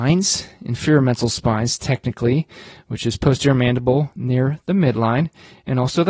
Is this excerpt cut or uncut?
uncut